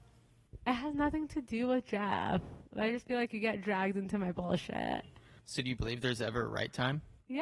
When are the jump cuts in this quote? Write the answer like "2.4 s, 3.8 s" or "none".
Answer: none